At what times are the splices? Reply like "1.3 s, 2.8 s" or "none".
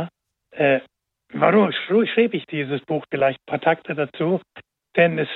none